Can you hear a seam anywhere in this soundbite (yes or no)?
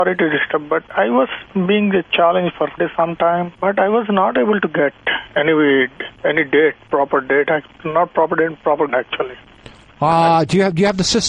yes